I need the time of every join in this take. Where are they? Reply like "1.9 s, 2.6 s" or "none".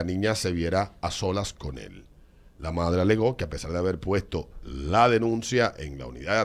none